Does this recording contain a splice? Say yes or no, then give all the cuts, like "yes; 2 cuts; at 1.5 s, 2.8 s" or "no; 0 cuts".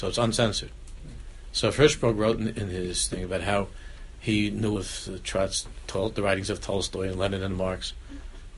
yes; 1 cut; at 4.8 s